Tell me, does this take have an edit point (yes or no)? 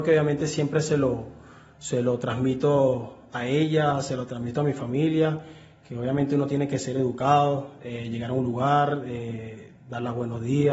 no